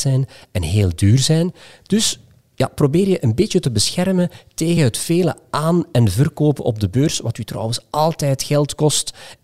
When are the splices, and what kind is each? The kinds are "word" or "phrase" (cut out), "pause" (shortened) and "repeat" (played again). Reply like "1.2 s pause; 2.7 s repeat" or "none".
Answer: none